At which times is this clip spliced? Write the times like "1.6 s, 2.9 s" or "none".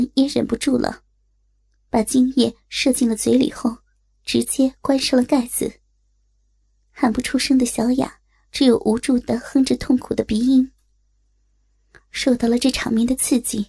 none